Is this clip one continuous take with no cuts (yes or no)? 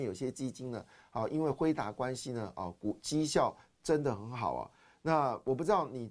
yes